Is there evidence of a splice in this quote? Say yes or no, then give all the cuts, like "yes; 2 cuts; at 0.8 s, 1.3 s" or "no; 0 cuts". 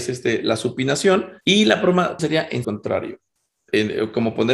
yes; 3 cuts; at 1.4 s, 2.2 s, 2.6 s